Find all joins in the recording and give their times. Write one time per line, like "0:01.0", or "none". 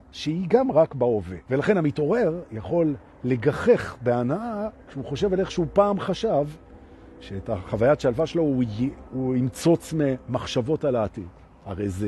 0:01.4
0:04.8